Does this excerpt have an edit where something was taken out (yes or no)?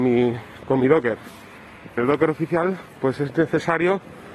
yes